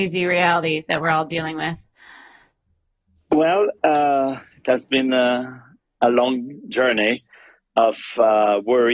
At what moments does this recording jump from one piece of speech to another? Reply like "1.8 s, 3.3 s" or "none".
none